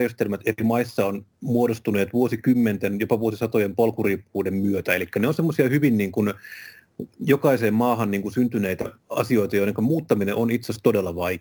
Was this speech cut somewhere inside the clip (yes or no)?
yes